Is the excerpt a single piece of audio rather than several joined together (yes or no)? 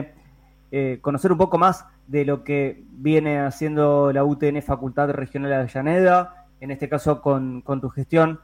no